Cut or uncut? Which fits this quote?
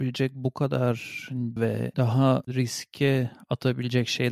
cut